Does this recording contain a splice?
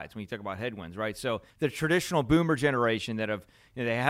yes; 1 cut; at 1.5 s

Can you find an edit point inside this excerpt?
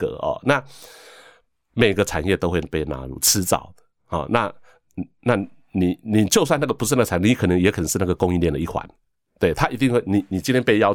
no; 0 cuts

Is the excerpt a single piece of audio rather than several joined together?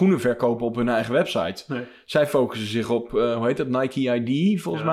yes; 0 cuts

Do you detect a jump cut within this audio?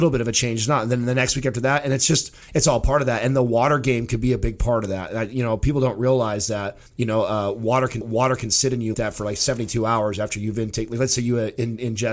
yes; 4 cuts; at 2.4 s, 6.9 s, 8.0 s, 8.9 s

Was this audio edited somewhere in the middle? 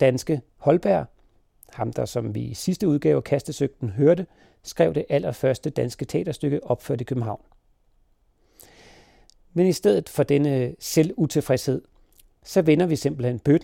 no; 0 cuts

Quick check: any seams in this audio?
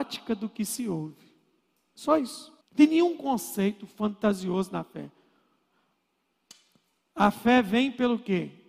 yes; 1 cut; at 2.6 s

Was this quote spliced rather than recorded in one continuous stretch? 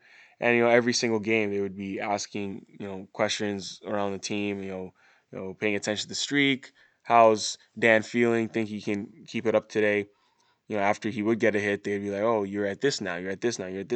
no; 0 cuts

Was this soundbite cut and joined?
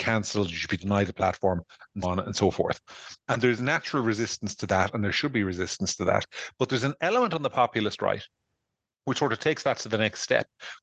yes; 1 cut; at 2.0 s

